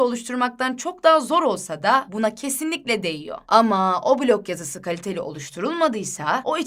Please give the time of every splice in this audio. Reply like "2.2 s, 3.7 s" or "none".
none